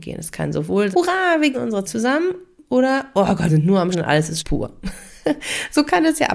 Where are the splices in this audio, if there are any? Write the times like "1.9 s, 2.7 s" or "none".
0.9 s, 1.5 s, 1.9 s, 3.5 s, 3.9 s, 4.4 s